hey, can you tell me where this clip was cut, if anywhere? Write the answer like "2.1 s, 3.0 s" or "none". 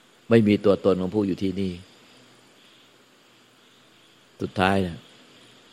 none